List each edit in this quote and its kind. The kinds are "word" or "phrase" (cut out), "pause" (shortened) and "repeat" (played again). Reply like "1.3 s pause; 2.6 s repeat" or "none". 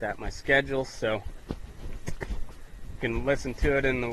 3.0 s word